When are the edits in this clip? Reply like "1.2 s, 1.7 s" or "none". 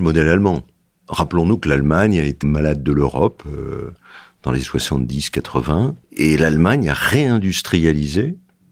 2.4 s, 4.6 s, 6.0 s